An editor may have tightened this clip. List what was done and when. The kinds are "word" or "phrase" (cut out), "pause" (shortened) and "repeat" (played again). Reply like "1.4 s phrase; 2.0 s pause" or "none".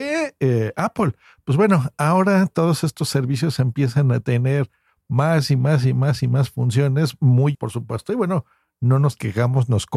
7.5 s word

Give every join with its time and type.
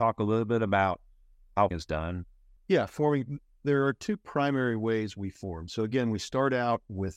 1.7 s word

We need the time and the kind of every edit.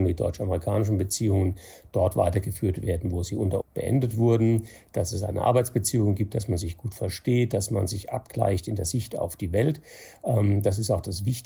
3.6 s word

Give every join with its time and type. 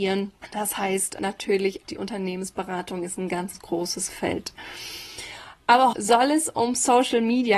1.8 s word; 3.5 s word; 4.1 s word; 5.9 s word

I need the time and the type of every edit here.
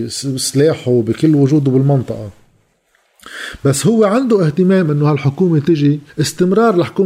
6.1 s pause

